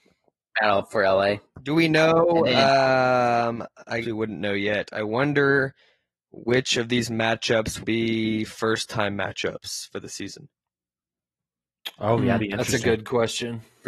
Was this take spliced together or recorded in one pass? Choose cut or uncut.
cut